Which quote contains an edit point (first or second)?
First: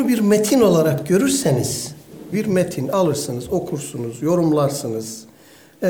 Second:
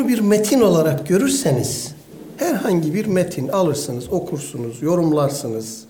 first